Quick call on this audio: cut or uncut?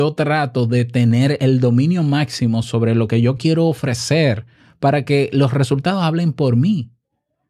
uncut